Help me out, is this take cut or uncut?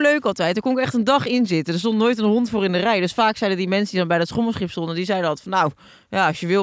uncut